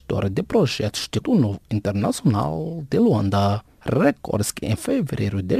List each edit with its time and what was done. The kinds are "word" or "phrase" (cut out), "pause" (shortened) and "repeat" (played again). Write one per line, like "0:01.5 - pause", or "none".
0:01.2 - word
0:01.6 - word
0:03.7 - pause